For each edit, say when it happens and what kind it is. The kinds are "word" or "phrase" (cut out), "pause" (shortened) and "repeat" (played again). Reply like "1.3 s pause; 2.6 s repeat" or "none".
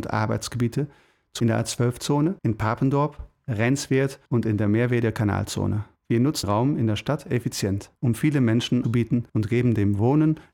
1.4 s phrase; 2.4 s pause; 4.3 s pause; 6.0 s pause; 6.4 s word; 8.0 s pause; 8.8 s phrase; 9.3 s pause